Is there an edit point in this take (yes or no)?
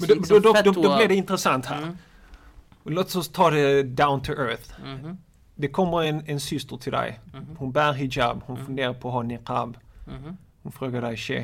no